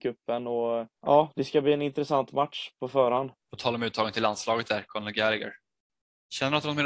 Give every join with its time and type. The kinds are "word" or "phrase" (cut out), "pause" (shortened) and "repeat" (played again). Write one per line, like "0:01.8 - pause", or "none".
0:00.9 - pause
0:03.4 - pause